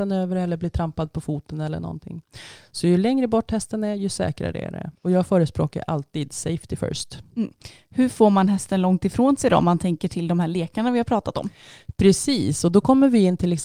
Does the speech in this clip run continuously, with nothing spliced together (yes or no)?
no